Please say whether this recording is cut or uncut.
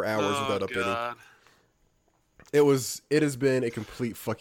uncut